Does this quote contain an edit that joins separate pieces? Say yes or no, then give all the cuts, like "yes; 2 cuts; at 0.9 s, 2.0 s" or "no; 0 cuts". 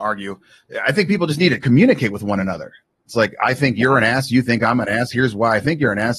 no; 0 cuts